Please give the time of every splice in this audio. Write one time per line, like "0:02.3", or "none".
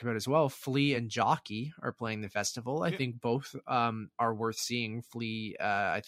none